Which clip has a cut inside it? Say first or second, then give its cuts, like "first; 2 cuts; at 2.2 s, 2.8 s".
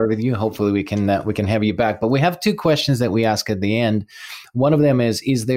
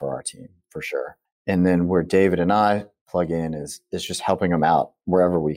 second; 1 cut; at 1.3 s